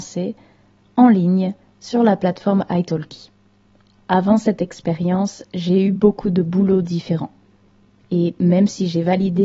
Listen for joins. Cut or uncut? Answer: uncut